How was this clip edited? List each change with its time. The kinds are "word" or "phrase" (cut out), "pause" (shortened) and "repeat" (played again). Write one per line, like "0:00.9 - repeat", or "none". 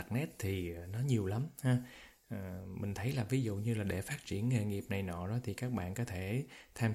none